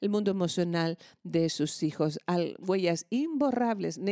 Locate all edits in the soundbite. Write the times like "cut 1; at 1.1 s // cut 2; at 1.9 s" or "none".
none